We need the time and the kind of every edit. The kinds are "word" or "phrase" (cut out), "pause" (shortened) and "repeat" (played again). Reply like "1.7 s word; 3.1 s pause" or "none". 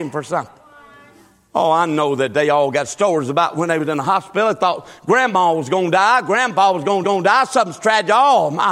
7.0 s repeat